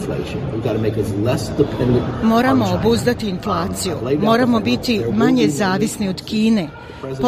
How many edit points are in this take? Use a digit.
0